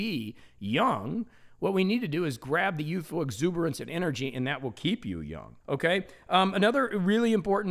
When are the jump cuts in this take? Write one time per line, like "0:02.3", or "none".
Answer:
0:05.6